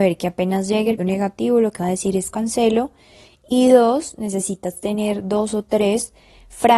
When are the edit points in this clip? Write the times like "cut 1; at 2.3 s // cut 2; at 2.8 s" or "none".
cut 1; at 1.0 s // cut 2; at 1.8 s // cut 3; at 2.3 s